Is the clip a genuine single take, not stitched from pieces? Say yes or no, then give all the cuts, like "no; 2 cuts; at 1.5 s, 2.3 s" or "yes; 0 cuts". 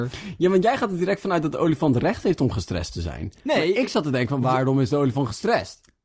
yes; 0 cuts